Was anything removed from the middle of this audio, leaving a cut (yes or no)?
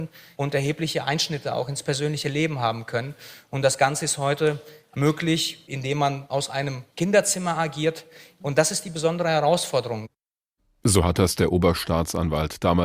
no